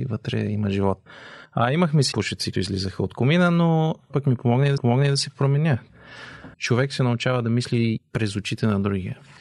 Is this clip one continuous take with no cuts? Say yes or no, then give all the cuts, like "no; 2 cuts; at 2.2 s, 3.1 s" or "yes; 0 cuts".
no; 7 cuts; at 1.4 s, 2.1 s, 2.5 s, 4.1 s, 4.8 s, 6.5 s, 8.0 s